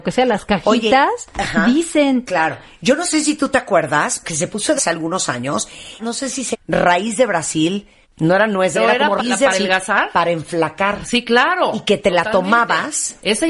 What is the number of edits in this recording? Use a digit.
8